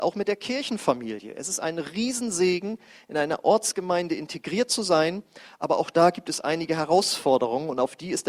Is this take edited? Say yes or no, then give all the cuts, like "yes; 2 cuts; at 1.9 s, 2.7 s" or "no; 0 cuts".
no; 0 cuts